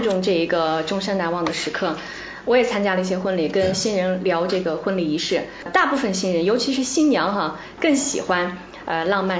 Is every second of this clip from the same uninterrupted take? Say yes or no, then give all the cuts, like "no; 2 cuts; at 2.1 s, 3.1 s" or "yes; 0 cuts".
yes; 0 cuts